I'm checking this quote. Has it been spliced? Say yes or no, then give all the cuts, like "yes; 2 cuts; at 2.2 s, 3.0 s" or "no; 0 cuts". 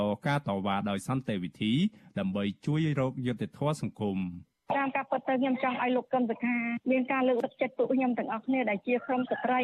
no; 0 cuts